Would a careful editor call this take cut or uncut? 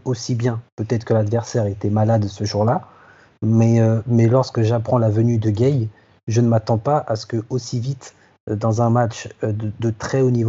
uncut